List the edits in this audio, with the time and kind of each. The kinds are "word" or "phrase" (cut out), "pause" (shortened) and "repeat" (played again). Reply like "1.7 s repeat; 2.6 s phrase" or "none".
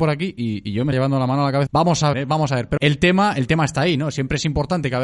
0.9 s word; 1.7 s word; 2.1 s word; 2.8 s word